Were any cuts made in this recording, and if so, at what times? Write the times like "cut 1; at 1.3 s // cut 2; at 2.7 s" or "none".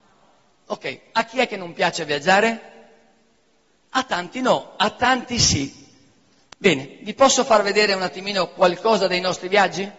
none